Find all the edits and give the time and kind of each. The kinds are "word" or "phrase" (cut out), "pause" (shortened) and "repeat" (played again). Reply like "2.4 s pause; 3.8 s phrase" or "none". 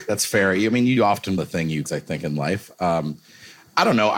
1.0 s word; 1.4 s word; 1.9 s word